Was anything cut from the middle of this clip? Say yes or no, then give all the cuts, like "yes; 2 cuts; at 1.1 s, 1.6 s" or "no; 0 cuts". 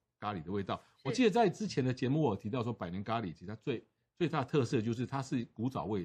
no; 0 cuts